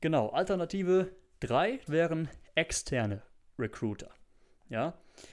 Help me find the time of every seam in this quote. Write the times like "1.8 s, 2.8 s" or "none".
1.9 s